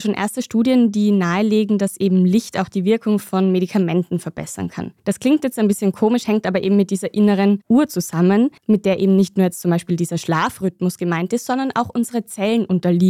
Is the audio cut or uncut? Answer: cut